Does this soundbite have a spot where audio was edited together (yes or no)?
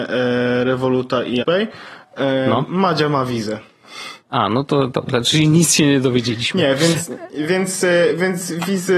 yes